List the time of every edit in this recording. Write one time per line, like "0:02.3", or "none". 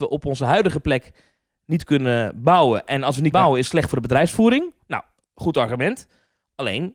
0:03.3